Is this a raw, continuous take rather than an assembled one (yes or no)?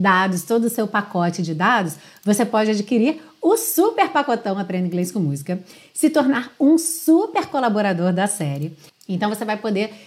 yes